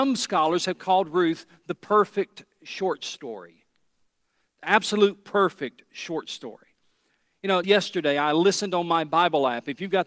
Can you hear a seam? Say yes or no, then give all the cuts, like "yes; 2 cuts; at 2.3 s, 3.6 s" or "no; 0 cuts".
yes; 1 cut; at 7.6 s